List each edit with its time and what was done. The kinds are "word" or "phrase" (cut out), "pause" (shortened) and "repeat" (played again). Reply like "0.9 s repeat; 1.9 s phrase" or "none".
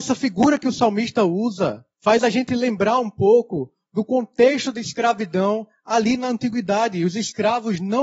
1.9 s pause